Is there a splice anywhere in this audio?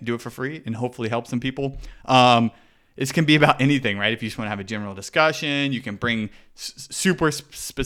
no; 0 cuts

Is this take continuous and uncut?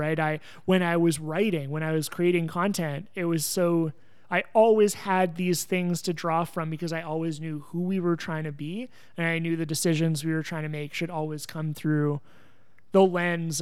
yes; 0 cuts

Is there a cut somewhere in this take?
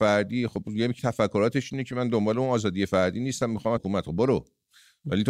yes; 2 cuts; at 1.0 s, 3.8 s

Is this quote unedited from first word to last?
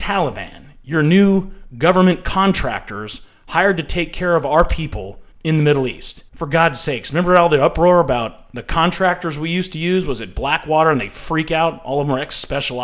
no; 2 cuts; at 5.3 s, 6.3 s

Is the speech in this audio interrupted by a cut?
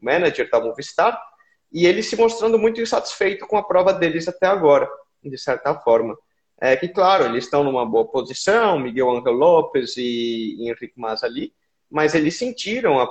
no; 0 cuts

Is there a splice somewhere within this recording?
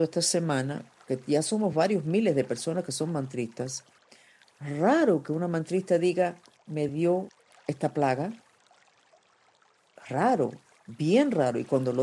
no; 0 cuts

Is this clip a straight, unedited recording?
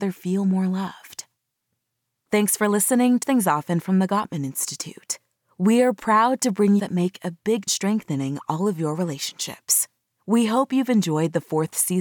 no; 3 cuts; at 3.2 s, 6.8 s, 7.7 s

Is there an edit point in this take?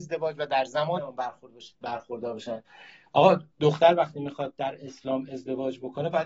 yes; 3 cuts; at 1.0 s, 1.7 s, 3.5 s

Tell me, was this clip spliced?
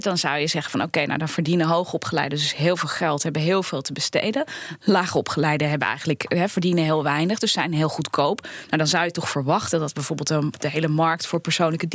no; 0 cuts

